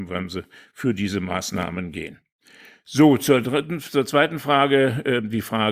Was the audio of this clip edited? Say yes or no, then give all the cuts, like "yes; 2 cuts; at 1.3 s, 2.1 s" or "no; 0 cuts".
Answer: no; 0 cuts